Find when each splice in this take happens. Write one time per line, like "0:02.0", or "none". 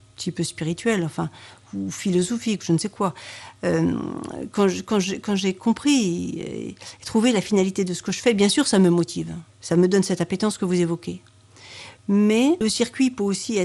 0:09.5